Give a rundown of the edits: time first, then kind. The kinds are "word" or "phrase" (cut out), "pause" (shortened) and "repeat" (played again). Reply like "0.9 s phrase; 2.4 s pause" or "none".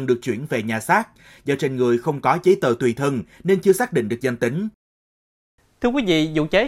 none